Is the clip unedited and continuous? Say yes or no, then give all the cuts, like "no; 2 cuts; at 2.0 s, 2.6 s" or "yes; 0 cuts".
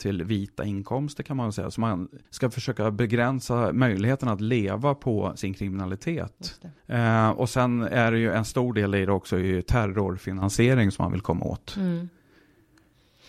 no; 2 cuts; at 2.2 s, 6.8 s